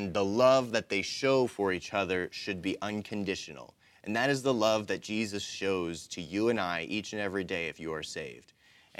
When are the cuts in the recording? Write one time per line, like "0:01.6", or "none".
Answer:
none

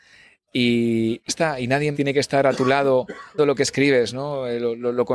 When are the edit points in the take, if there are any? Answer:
0:01.3
0:01.9
0:03.4

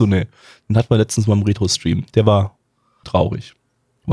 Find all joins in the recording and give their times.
0:03.0

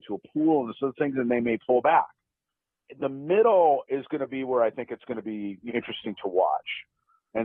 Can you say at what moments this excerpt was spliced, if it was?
0:05.7

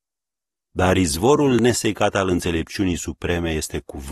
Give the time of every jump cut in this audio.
none

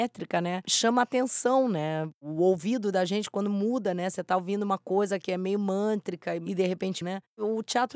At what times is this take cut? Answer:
0:07.0

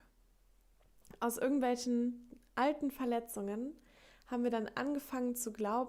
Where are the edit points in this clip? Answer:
none

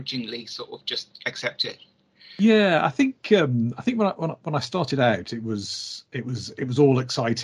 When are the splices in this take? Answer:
none

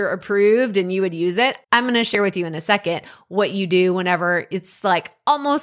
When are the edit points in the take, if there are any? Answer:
0:01.6

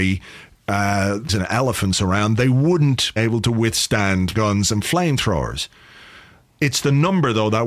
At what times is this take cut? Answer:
0:01.3
0:03.2
0:04.3

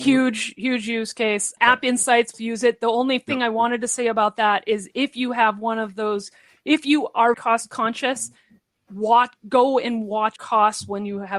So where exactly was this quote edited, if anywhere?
0:01.6
0:02.3
0:07.3
0:10.4

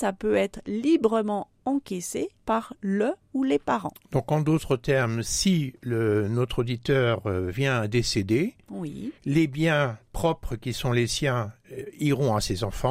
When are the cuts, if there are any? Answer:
0:02.4
0:09.2

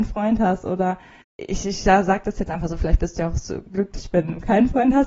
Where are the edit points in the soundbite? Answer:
0:01.2

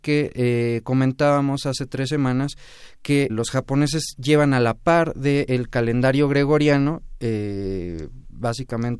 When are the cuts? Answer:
0:03.3

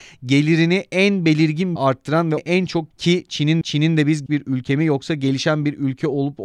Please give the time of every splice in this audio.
0:01.8
0:02.4
0:02.9
0:03.6
0:04.3

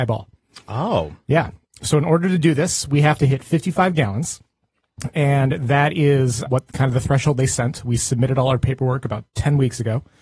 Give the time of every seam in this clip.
0:06.5

